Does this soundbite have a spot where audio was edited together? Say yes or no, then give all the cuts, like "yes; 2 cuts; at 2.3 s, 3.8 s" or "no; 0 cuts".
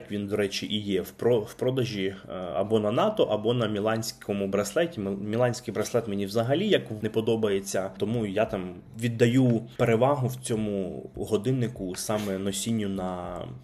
yes; 1 cut; at 7.0 s